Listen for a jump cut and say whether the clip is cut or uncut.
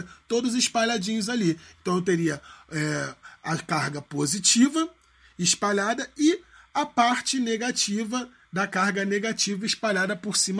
uncut